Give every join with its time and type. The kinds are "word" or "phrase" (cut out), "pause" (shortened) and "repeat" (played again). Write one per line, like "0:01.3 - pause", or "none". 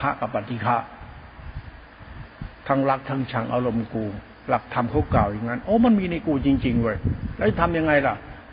0:02.6 - pause